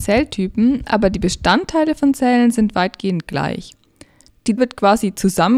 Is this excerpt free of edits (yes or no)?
no